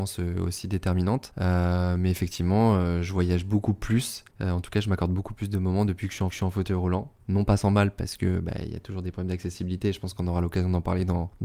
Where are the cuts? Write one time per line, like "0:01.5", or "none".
0:04.3
0:06.3
0:07.2